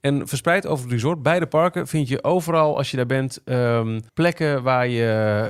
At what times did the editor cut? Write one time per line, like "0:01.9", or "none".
0:04.1